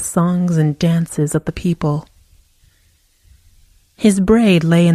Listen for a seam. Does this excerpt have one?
no; 0 cuts

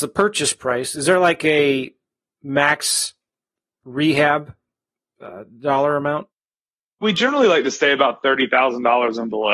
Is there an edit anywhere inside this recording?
no; 0 cuts

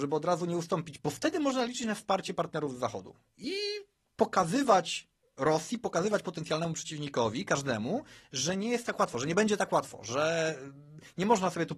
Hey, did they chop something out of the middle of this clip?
yes; 1 cut; at 1.0 s

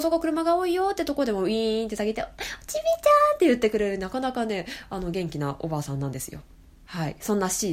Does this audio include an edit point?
no; 0 cuts

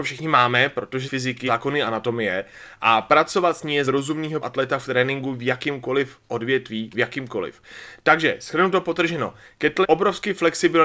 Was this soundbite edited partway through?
yes; 6 cuts; at 1.0 s, 1.5 s, 3.8 s, 4.4 s, 6.9 s, 9.8 s

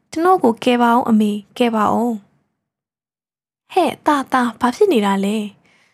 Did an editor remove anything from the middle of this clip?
no; 0 cuts

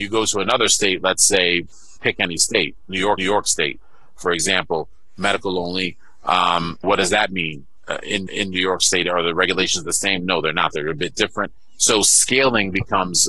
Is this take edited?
yes; 4 cuts; at 2.0 s, 3.2 s, 6.8 s, 8.3 s

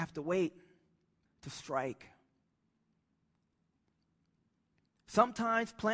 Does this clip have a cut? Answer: yes; 1 cut; at 1.3 s

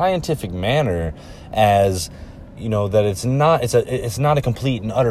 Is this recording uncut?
no; 1 cut; at 2.6 s

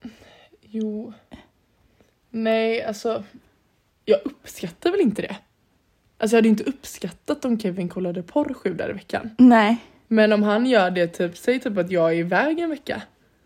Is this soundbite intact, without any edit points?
yes; 0 cuts

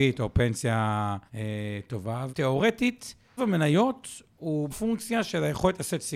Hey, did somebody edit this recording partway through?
yes; 4 cuts; at 1.3 s, 2.3 s, 3.4 s, 4.7 s

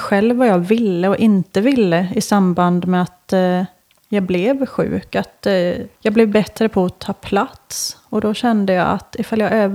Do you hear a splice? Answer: yes; 1 cut; at 6.0 s

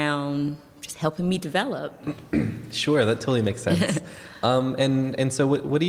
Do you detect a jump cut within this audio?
no; 0 cuts

